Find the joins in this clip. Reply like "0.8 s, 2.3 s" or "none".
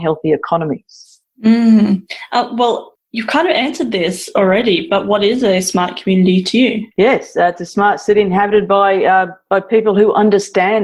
1.3 s, 6.9 s

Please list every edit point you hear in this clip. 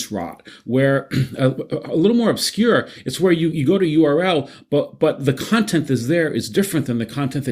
3.5 s

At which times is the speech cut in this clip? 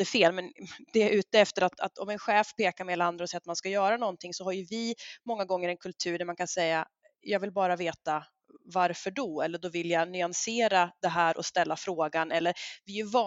none

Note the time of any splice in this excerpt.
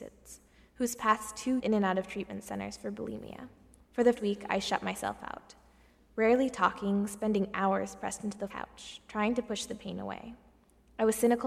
1.6 s, 3.8 s, 4.1 s, 8.5 s

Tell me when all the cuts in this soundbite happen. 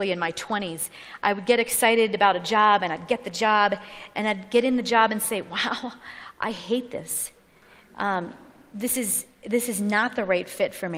none

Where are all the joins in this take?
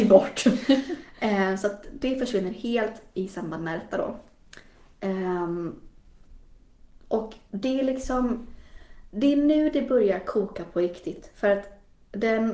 none

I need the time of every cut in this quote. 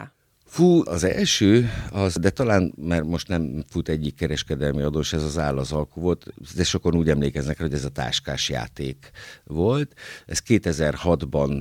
none

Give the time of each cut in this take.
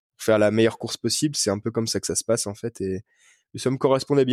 none

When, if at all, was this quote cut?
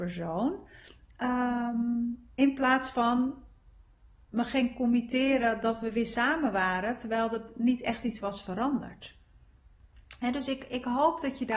none

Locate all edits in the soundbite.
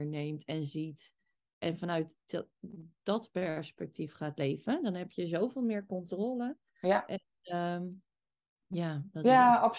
none

